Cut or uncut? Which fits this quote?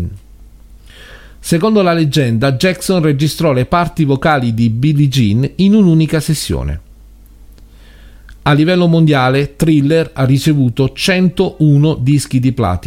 uncut